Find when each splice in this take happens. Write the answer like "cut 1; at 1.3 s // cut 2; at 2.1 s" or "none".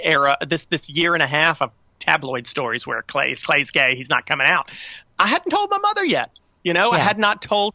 none

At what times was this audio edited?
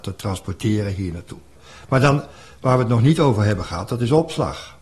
none

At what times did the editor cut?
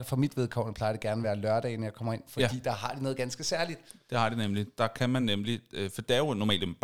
none

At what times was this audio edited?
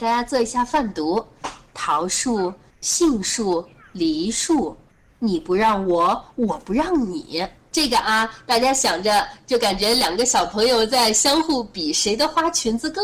none

